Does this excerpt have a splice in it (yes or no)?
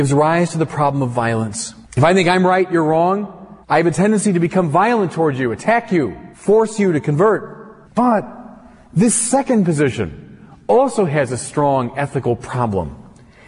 yes